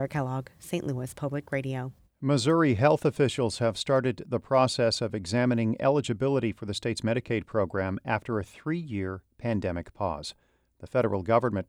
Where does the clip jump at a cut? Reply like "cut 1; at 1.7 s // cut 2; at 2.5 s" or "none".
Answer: none